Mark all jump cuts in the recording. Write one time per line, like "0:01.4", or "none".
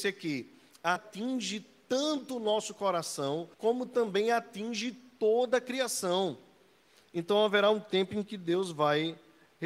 0:01.0
0:03.5